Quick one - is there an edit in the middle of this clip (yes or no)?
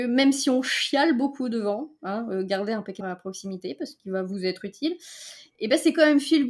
yes